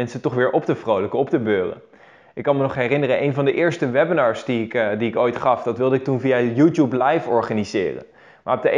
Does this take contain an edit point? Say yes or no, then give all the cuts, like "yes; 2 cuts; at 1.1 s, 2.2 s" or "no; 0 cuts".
no; 0 cuts